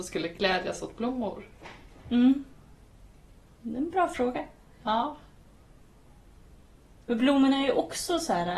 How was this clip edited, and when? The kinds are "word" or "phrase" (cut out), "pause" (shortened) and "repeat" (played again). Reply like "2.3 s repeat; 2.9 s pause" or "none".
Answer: 3.3 s pause